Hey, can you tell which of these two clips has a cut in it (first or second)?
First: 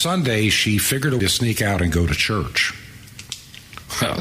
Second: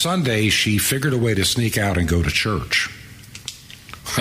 first